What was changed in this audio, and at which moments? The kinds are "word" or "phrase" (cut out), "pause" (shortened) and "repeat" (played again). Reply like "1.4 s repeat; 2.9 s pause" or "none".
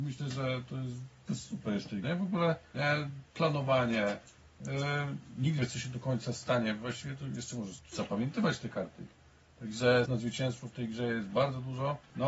1.3 s word; 2.0 s word; 2.7 s word; 5.6 s word; 7.8 s word; 10.1 s word